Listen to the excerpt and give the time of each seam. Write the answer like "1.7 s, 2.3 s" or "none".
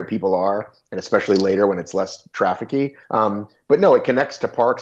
3.0 s

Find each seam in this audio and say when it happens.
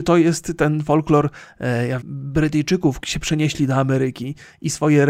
2.0 s, 3.0 s

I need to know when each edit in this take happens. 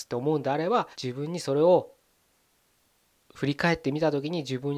0.9 s

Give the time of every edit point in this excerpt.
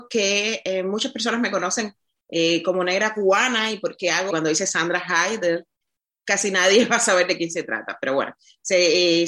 4.3 s

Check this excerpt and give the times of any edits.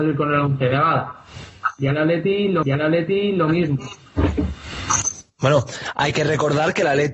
2.6 s

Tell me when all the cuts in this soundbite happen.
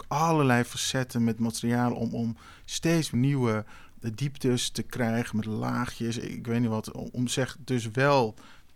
3.1 s

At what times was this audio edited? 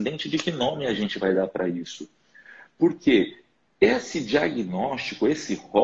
none

